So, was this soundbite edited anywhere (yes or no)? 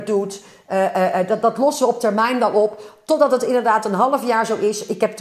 no